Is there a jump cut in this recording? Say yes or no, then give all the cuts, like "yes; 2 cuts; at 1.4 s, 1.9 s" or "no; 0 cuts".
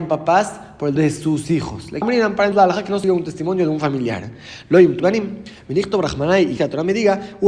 yes; 6 cuts; at 1.0 s, 2.0 s, 2.5 s, 3.0 s, 5.0 s, 6.6 s